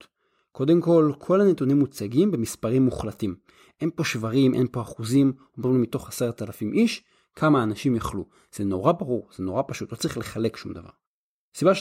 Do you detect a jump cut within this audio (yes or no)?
no